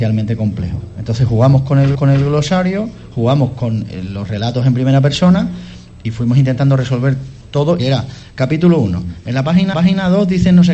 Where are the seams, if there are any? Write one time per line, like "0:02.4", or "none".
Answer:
0:01.9
0:07.4
0:07.8
0:09.7